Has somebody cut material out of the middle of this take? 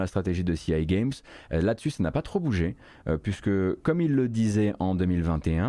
no; 0 cuts

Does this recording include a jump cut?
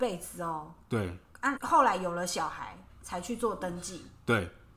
yes; 1 cut; at 1.6 s

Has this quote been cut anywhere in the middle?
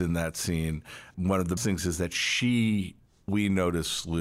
yes; 3 cuts; at 1.1 s, 1.6 s, 3.3 s

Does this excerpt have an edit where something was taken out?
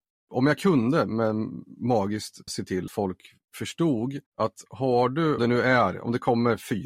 yes; 4 cuts; at 2.5 s, 2.9 s, 4.3 s, 5.4 s

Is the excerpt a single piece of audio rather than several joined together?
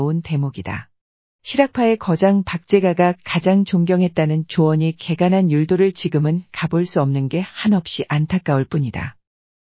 yes; 0 cuts

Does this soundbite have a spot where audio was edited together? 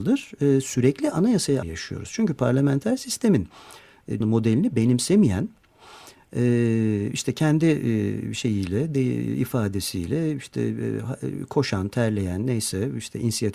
yes; 2 cuts; at 1.6 s, 4.2 s

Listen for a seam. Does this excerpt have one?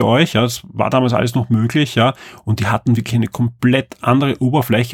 no; 0 cuts

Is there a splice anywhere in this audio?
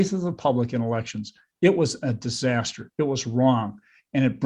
no; 0 cuts

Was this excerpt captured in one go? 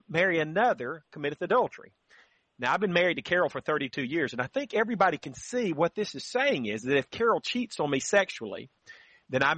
yes; 0 cuts

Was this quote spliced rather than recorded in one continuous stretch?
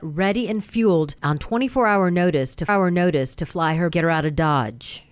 yes; 2 cuts; at 2.7 s, 3.9 s

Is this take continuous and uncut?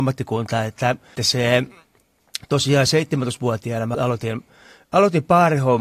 no; 2 cuts; at 1.2 s, 3.9 s

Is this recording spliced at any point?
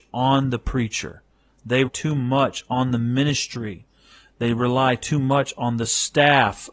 yes; 1 cut; at 1.9 s

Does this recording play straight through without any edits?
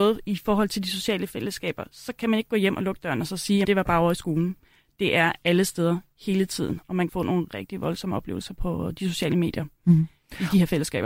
no; 4 cuts; at 3.6 s, 7.1 s, 7.5 s, 8.6 s

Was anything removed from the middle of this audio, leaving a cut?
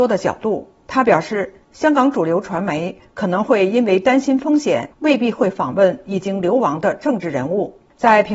yes; 1 cut; at 4.9 s

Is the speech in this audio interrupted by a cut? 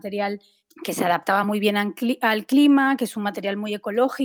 no; 0 cuts

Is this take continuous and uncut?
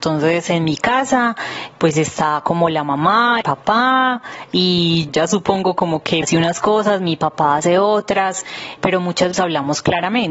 no; 6 cuts; at 1.7 s, 3.4 s, 5.1 s, 6.2 s, 8.8 s, 9.3 s

